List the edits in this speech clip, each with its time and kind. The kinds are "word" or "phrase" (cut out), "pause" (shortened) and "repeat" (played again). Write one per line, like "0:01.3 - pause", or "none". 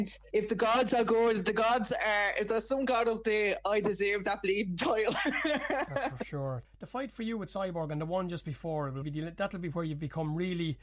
0:09.0 - word

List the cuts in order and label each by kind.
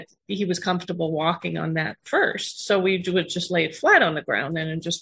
0:02.0 - pause

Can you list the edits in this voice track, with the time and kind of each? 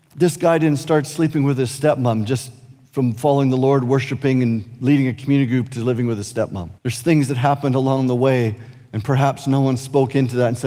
0:06.8 - pause

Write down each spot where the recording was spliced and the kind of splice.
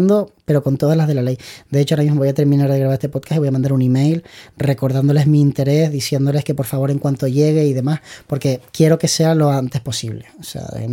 none

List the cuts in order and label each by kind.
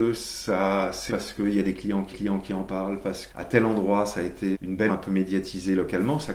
0:01.1 - word
0:02.1 - repeat
0:03.3 - word
0:04.5 - word
0:04.9 - word

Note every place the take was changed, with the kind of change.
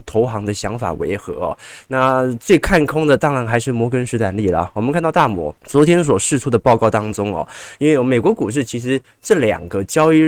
0:05.6 - pause

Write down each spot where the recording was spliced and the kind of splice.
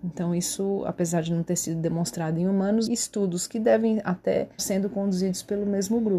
0:02.9 - word
0:04.6 - word

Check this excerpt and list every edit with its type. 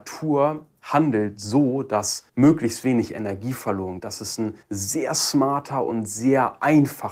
0:02.3 - pause
0:04.0 - word
0:04.6 - pause

